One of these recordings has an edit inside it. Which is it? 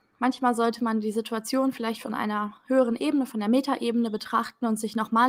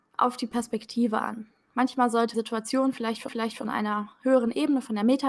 second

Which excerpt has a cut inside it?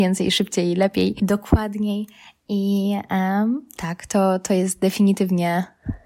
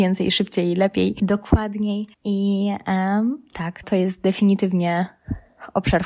second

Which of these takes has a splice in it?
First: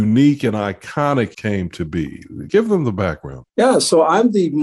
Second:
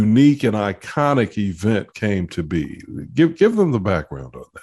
first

